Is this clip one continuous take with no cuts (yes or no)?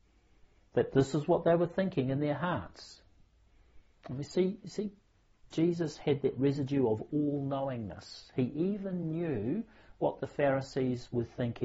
yes